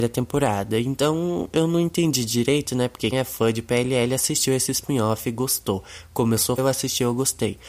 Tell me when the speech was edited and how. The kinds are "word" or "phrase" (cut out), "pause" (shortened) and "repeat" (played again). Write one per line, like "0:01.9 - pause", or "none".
0:03.1 - word
0:06.6 - word